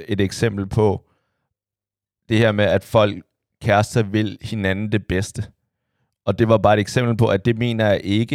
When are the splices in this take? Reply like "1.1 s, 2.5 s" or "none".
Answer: none